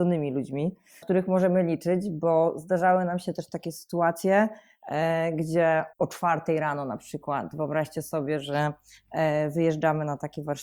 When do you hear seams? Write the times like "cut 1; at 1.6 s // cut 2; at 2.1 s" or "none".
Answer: cut 1; at 1.0 s // cut 2; at 5.9 s

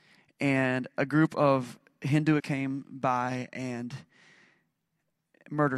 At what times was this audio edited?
cut 1; at 2.4 s

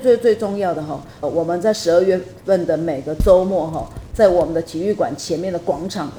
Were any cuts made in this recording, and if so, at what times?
cut 1; at 1.2 s

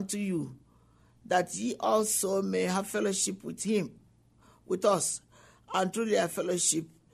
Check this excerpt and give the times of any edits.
none

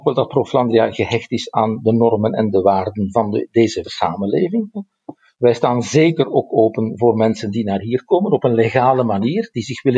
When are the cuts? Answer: cut 1; at 3.8 s

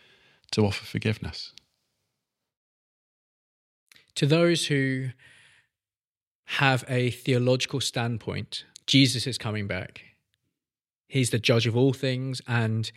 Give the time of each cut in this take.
cut 1; at 8.7 s

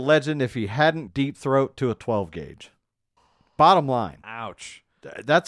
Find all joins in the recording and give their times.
cut 1; at 1.1 s // cut 2; at 3.2 s

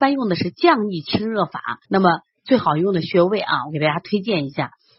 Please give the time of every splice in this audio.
cut 1; at 1.8 s

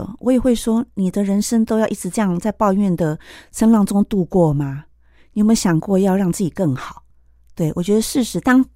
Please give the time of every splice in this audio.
none

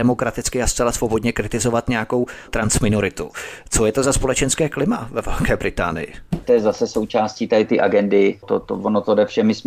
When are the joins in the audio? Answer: cut 1; at 2.5 s // cut 2; at 8.4 s

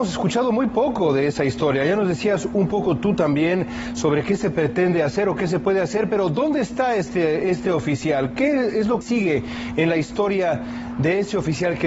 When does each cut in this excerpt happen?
cut 1; at 9.0 s

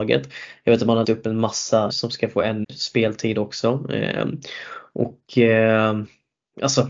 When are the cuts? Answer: cut 1; at 1.0 s // cut 2; at 1.9 s // cut 3; at 2.6 s

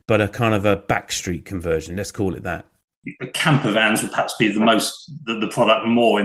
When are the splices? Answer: none

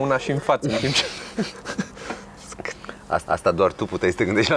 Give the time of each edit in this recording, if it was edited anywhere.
cut 1; at 3.3 s

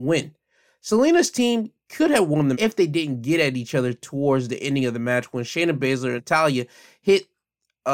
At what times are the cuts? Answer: cut 1; at 2.5 s // cut 2; at 6.2 s

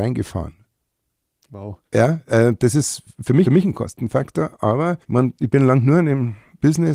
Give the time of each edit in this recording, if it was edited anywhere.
cut 1; at 1.9 s // cut 2; at 3.4 s // cut 3; at 5.0 s

